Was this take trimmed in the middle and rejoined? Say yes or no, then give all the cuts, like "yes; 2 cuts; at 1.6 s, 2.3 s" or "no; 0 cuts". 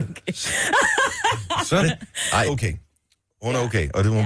yes; 2 cuts; at 1.8 s, 2.5 s